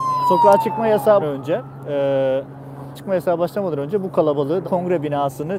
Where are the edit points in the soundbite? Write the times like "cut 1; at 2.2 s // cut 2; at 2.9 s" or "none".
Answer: cut 1; at 1.2 s // cut 2; at 2.9 s // cut 3; at 4.6 s